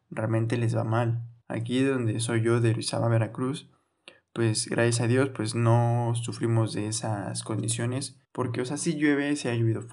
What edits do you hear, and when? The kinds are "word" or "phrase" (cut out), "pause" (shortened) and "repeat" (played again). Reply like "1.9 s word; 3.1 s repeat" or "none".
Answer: 1.4 s pause; 8.2 s pause

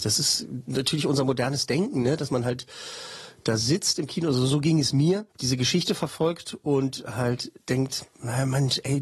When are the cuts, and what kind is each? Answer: 5.3 s pause; 7.6 s pause

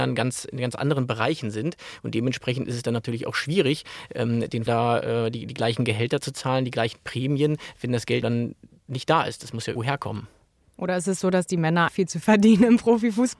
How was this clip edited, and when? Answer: 4.7 s word; 8.2 s word; 9.8 s word; 11.9 s word; 12.2 s word

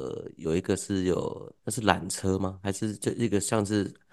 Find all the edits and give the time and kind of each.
1.6 s pause

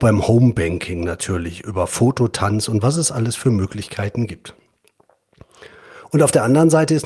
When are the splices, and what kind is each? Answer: none

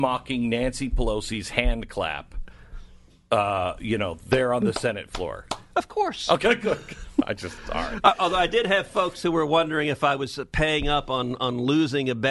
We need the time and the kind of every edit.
none

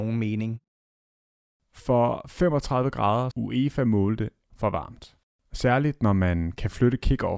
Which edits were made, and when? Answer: 3.3 s word; 4.5 s word

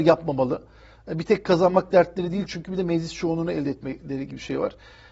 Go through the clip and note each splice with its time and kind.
none

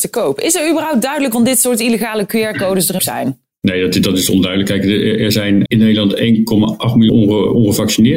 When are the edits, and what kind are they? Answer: 1.3 s word; 3.0 s word; 5.7 s word; 7.1 s word

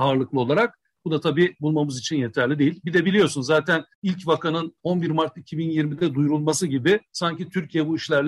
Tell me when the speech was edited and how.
3.9 s pause; 7.1 s pause

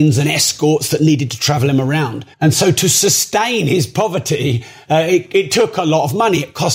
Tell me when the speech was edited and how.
2.3 s pause

